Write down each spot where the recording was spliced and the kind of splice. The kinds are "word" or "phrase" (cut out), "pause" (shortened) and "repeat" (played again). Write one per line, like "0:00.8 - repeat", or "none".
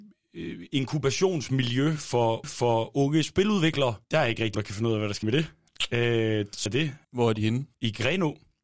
0:02.4 - repeat
0:04.0 - pause
0:04.5 - word
0:05.2 - word
0:06.7 - word
0:07.0 - pause
0:07.7 - pause